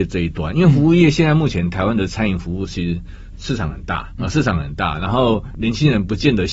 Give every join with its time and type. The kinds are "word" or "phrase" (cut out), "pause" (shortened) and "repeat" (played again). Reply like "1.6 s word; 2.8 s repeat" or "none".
4.2 s word